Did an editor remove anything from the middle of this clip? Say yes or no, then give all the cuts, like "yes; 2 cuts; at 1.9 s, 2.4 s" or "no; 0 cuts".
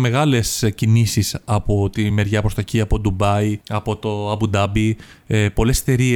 no; 0 cuts